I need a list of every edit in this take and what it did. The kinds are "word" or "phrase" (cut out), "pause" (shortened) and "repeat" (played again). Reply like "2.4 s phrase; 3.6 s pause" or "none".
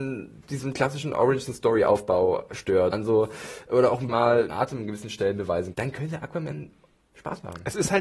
2.9 s word; 4.1 s word; 4.5 s word; 5.7 s word; 7.1 s word

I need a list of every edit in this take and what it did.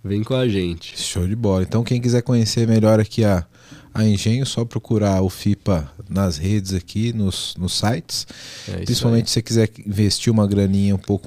none

